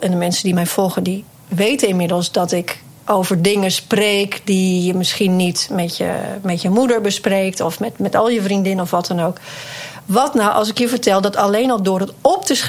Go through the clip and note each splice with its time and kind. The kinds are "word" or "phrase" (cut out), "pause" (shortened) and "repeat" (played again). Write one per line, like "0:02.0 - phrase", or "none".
none